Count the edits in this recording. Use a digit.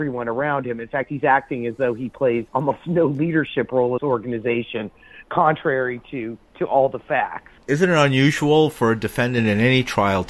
3